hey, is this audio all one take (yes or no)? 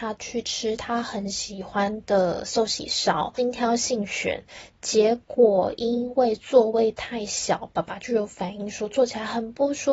yes